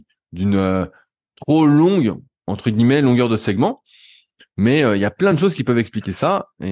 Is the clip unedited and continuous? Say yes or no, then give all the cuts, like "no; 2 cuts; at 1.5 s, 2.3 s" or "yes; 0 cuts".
yes; 0 cuts